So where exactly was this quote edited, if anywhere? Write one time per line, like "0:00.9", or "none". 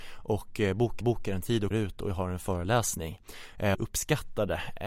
0:01.0
0:01.7
0:03.7